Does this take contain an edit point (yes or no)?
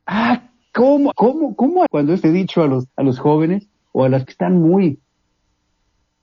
yes